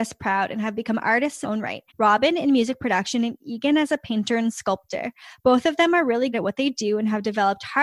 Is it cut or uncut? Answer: cut